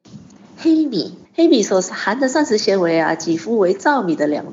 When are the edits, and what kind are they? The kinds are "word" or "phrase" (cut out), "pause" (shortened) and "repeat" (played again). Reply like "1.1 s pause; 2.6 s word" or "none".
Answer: 1.3 s pause